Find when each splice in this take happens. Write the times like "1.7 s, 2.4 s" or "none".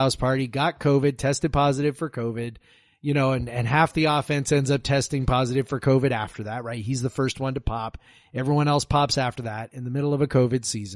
none

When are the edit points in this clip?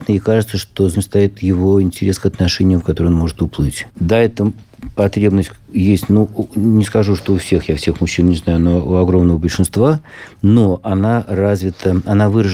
0.9 s, 2.8 s, 3.9 s, 5.6 s

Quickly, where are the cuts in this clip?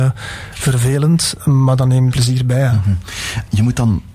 2.1 s

